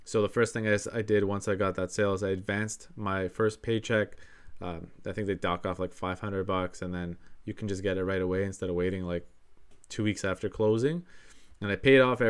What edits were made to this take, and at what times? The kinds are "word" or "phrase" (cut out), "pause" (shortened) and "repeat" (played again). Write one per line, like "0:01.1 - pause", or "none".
none